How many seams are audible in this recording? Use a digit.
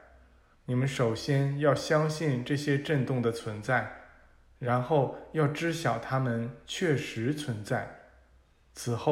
0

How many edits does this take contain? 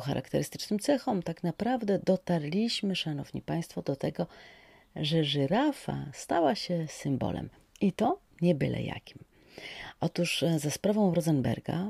0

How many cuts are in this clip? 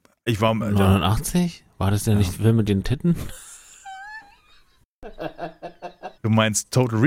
3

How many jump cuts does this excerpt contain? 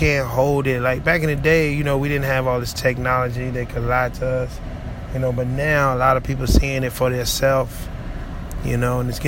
0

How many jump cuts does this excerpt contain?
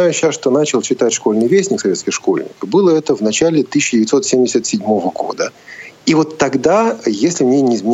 0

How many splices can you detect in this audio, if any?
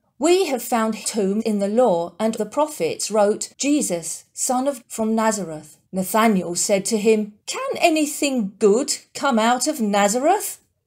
7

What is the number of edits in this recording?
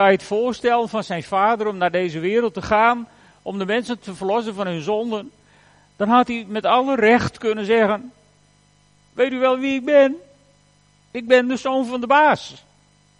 0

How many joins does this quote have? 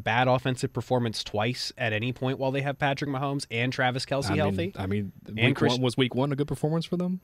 0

